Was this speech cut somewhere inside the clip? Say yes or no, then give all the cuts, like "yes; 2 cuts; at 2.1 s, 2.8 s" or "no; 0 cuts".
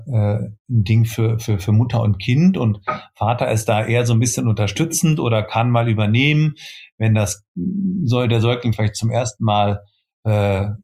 no; 0 cuts